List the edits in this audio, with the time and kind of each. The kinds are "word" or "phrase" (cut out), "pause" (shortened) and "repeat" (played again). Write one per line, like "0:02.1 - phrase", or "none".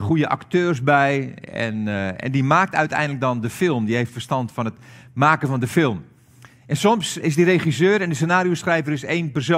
0:07.2 - word